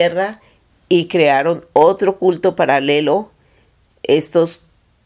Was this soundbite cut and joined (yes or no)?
no